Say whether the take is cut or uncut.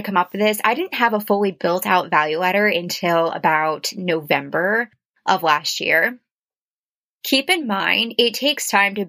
uncut